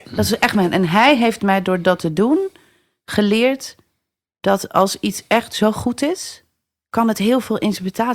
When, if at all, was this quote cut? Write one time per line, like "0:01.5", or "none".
none